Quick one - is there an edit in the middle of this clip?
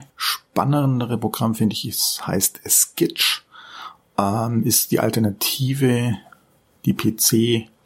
no; 0 cuts

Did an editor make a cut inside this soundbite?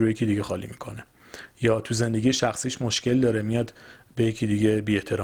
no; 0 cuts

